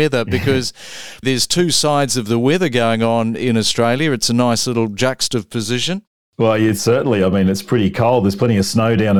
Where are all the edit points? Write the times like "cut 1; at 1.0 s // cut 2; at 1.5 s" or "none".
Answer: cut 1; at 1.2 s